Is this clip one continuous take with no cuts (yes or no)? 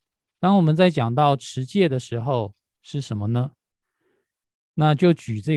yes